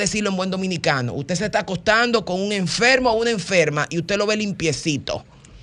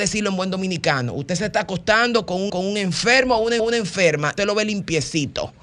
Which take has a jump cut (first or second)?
second